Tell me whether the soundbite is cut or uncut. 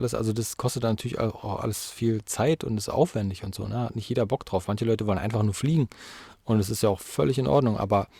uncut